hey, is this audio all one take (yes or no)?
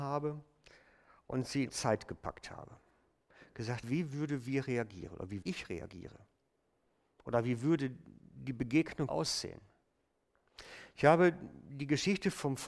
no